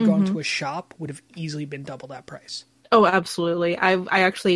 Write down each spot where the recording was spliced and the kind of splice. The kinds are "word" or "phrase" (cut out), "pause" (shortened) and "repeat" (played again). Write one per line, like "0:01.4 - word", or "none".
none